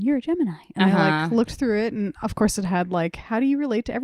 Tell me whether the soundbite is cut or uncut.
uncut